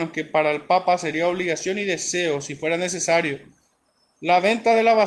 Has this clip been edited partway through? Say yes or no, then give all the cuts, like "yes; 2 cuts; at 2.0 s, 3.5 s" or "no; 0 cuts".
no; 0 cuts